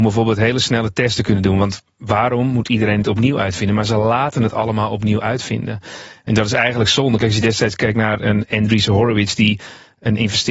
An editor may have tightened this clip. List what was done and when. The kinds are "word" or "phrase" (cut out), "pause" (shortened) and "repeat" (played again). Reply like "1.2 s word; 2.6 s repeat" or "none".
none